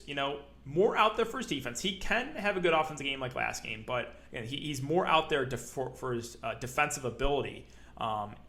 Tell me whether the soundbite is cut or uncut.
uncut